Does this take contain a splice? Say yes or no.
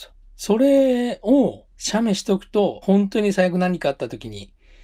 yes